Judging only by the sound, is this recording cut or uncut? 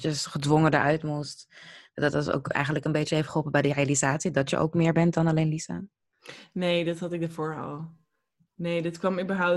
uncut